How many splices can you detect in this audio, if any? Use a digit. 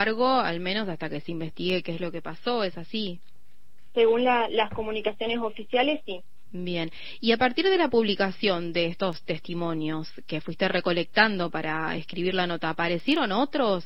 0